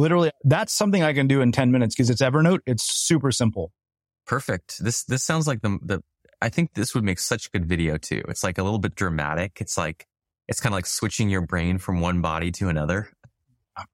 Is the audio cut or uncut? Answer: uncut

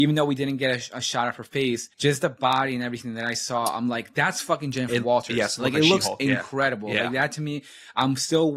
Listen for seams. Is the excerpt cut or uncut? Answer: cut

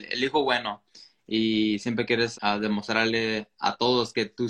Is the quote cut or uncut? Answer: cut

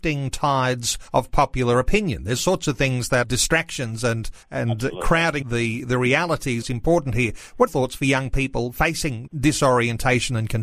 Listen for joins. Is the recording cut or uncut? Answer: cut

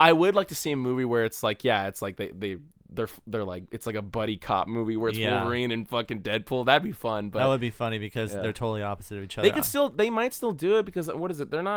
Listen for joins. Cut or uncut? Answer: uncut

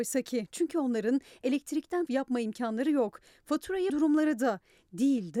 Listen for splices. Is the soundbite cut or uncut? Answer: cut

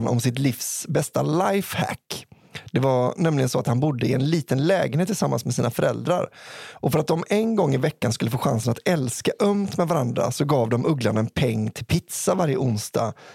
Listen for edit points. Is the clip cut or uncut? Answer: uncut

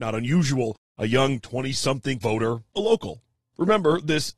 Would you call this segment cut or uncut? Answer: cut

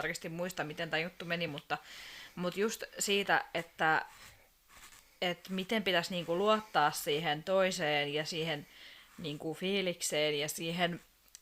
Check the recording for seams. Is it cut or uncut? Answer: uncut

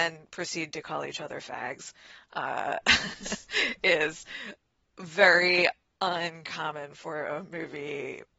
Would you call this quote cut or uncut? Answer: uncut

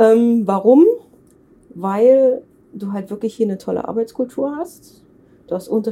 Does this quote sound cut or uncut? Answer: uncut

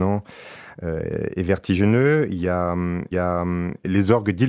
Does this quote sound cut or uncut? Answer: cut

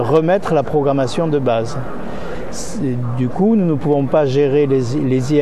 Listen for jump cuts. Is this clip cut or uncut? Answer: uncut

